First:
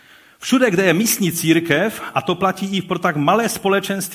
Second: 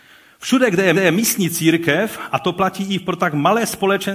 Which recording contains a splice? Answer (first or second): second